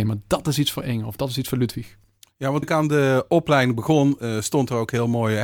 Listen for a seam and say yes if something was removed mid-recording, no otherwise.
yes